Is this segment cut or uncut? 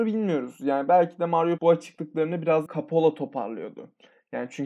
cut